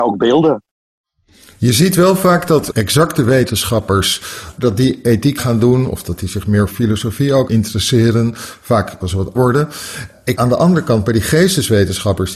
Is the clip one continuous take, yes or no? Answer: no